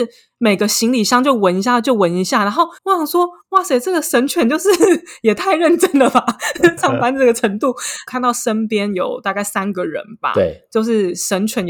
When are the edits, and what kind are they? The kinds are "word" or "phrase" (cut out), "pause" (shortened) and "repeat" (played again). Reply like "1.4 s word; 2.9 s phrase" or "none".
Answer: 2.8 s pause; 6.8 s word